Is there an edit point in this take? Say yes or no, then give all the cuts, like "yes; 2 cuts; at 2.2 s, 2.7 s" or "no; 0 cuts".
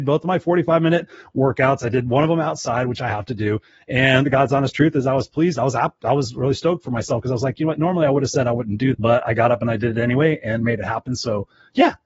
yes; 1 cut; at 8.9 s